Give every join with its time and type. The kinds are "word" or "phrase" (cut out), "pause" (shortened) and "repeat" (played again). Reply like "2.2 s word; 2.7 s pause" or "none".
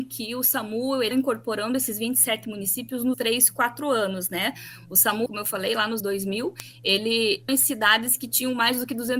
1.1 s word; 3.1 s word; 5.3 s word; 6.0 s word; 7.5 s word